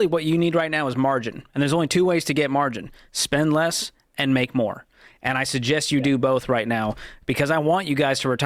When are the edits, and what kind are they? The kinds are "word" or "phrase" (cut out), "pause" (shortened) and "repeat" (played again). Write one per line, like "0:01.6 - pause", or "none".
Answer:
none